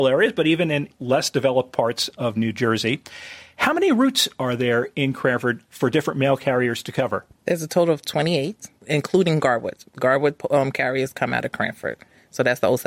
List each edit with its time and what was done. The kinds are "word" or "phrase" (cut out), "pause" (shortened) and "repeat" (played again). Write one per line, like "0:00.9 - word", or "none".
0:07.3 - pause
0:08.8 - pause
0:09.9 - pause